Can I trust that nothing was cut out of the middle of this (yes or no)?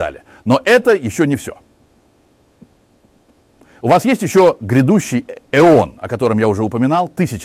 yes